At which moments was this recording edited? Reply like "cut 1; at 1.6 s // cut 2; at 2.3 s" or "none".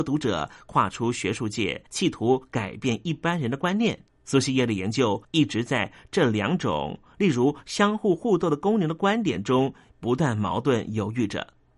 cut 1; at 1.9 s // cut 2; at 4.1 s // cut 3; at 5.2 s